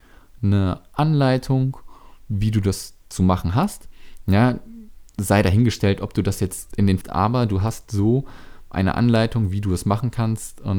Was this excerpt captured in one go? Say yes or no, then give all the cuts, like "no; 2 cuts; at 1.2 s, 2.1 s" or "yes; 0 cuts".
no; 2 cuts; at 6.7 s, 7.0 s